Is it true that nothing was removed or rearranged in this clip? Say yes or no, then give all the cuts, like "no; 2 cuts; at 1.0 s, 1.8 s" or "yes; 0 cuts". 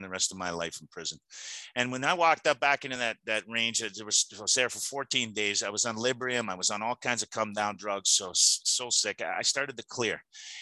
yes; 0 cuts